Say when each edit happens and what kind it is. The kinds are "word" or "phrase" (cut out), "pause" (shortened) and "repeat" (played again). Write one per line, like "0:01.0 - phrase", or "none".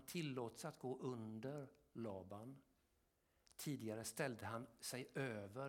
none